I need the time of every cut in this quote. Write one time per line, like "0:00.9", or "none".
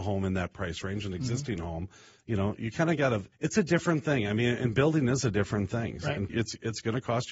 0:03.3
0:06.3